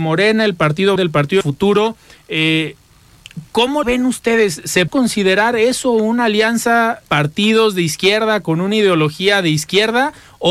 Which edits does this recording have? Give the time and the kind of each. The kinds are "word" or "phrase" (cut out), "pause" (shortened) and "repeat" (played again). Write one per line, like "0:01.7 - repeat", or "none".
0:01.0 - word
0:01.4 - phrase
0:03.8 - word
0:04.9 - word
0:07.1 - word

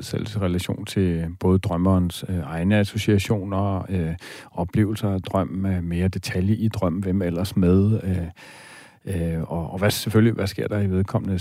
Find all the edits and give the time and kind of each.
none

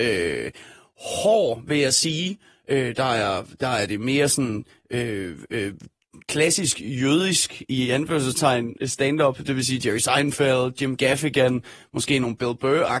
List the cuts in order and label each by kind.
none

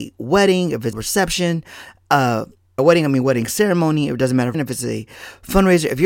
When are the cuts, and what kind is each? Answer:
0:00.9 - word
0:02.8 - word
0:04.5 - phrase

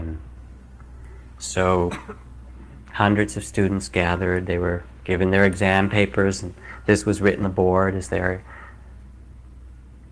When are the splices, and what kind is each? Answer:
0:07.4 - word

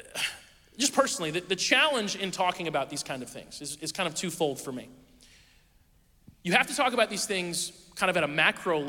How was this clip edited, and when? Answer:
none

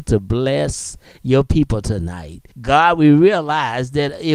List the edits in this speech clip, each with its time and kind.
0:02.5 - pause

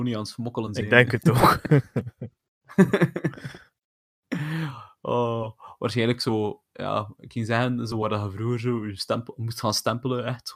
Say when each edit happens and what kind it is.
none

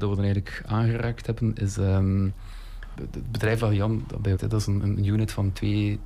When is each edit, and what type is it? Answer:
0:02.9 - phrase
0:04.4 - word

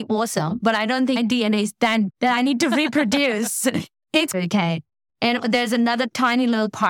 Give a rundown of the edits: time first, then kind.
0:01.2 - word
0:02.1 - word
0:04.3 - word
0:05.4 - word

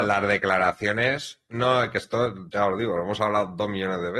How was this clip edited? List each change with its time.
none

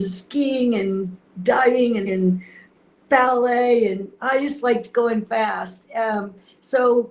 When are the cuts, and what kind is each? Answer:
0:02.1 - word

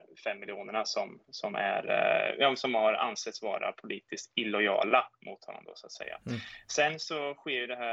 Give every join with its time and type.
none

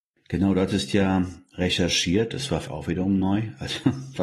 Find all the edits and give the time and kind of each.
0:02.7 - word

